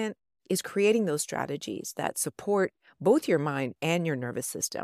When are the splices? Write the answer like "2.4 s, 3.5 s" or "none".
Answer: none